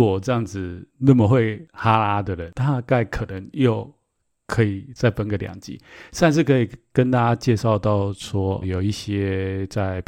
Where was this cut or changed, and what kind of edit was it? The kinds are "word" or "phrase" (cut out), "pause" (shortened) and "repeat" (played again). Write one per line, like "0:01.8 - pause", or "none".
0:08.6 - word